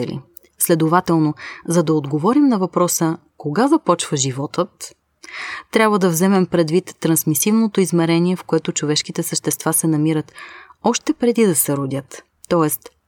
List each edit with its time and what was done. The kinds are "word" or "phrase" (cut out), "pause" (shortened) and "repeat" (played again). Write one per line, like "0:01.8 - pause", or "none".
none